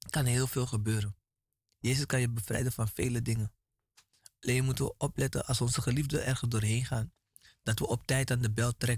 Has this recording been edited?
no; 0 cuts

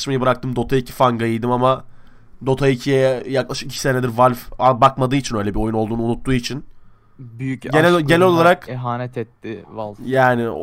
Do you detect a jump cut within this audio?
no; 0 cuts

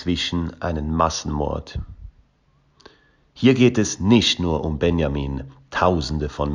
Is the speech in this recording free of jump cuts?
yes; 0 cuts

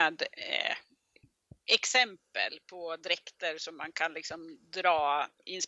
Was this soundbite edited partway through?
no; 0 cuts

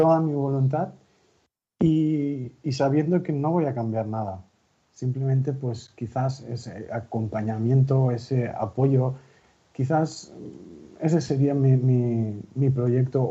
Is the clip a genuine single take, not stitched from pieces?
yes; 0 cuts

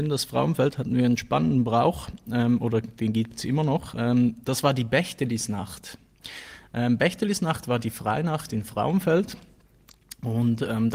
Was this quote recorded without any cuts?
yes; 0 cuts

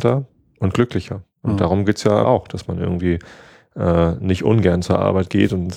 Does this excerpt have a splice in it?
yes; 1 cut; at 2.2 s

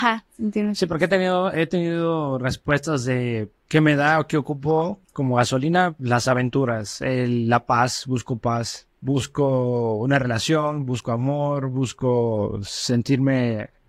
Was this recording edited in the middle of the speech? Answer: yes; 3 cuts; at 3.6 s, 5.0 s, 8.9 s

